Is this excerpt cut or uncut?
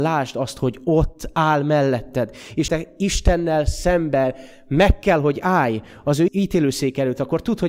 cut